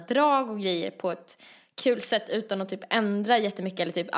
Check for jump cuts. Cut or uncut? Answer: uncut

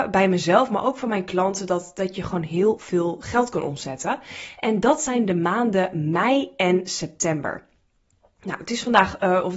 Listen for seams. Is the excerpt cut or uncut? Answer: uncut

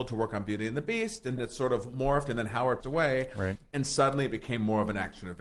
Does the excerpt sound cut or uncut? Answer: cut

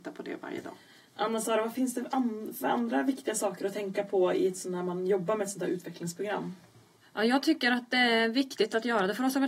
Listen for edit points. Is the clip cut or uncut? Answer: uncut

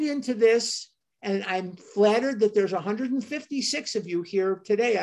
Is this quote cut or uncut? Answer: uncut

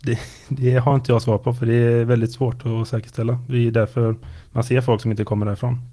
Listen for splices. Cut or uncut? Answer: uncut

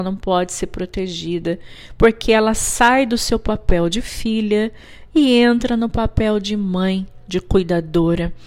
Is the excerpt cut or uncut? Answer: uncut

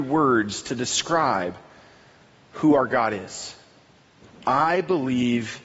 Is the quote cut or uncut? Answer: uncut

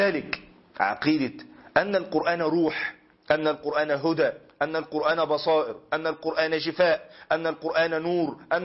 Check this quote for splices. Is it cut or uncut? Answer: uncut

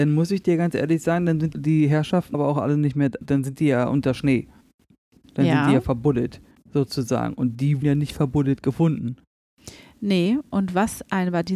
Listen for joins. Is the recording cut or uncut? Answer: cut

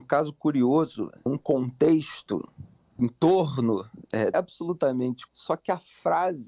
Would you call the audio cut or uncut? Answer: cut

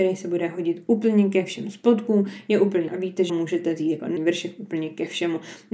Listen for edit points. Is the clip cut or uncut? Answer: cut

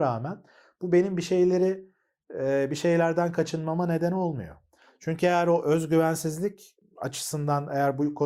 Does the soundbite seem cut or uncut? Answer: uncut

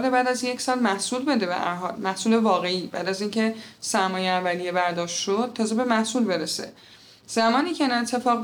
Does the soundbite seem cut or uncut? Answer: uncut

